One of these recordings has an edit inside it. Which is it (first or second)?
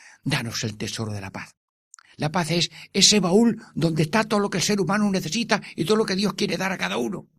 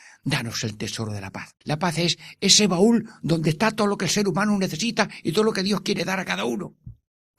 second